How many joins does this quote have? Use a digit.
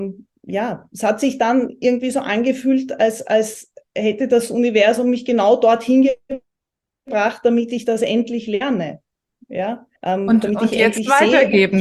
1